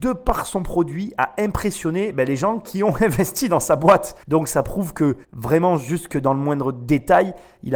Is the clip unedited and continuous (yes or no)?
no